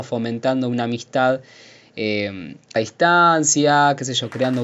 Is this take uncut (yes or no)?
no